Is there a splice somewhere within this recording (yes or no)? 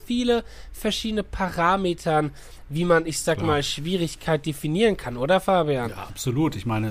no